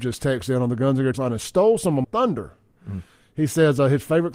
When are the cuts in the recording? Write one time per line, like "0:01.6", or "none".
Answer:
0:01.1
0:02.0